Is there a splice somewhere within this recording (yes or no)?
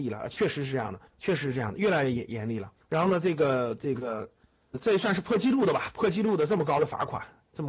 yes